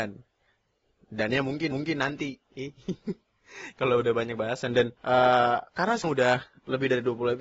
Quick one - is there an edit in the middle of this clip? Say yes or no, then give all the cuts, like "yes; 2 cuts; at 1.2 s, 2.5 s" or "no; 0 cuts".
yes; 3 cuts; at 1.7 s, 5.0 s, 6.0 s